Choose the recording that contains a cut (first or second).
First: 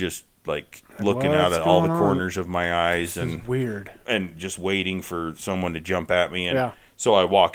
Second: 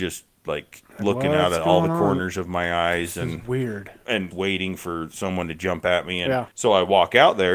second